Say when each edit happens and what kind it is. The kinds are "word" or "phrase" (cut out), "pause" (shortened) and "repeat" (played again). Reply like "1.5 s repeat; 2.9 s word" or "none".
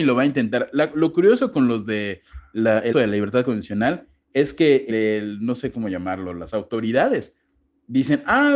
2.9 s word; 4.9 s word